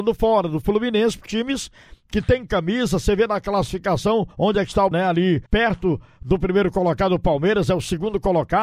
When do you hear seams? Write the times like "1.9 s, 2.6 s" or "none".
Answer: 1.3 s, 4.3 s, 4.9 s, 5.5 s